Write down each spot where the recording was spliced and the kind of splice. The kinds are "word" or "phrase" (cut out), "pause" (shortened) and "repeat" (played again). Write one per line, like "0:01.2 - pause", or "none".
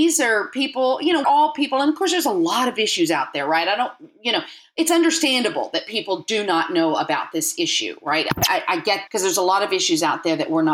0:01.2 - word
0:09.1 - word